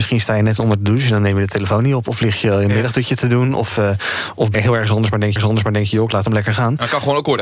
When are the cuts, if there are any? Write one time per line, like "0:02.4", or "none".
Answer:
0:04.5
0:05.4